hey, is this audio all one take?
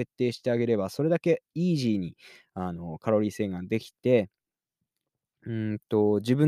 yes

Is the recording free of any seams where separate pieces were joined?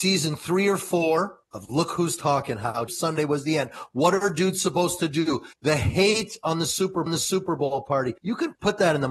no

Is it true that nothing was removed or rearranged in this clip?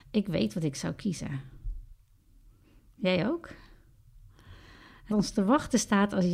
no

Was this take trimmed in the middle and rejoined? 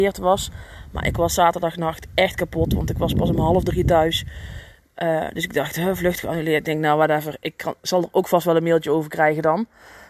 no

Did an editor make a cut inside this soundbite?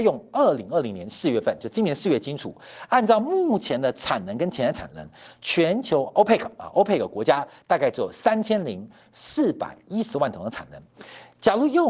no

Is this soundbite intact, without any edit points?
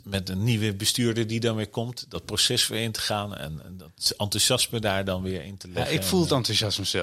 yes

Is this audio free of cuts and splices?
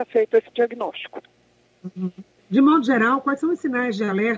no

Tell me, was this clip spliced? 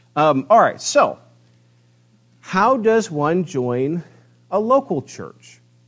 no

